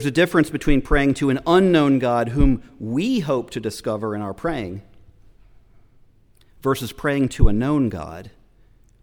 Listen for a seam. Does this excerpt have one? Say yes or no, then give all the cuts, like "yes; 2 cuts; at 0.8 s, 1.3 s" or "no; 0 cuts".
no; 0 cuts